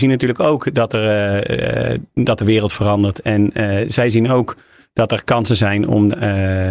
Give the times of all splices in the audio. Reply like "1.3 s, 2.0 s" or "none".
none